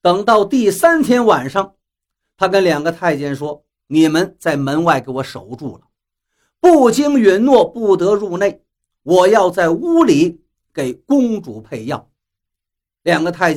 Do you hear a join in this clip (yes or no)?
no